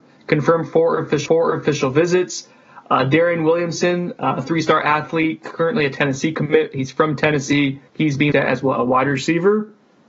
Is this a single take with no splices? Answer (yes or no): no